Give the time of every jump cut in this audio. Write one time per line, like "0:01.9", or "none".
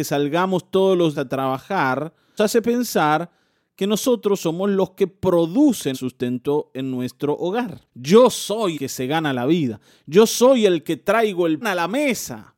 0:01.1
0:02.4
0:05.9
0:07.9
0:08.7
0:11.6